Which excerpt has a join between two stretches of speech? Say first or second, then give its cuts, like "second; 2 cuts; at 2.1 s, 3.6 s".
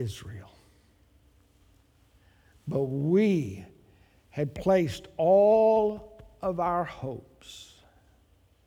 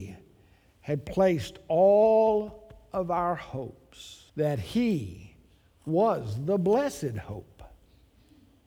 second; 1 cut; at 4.3 s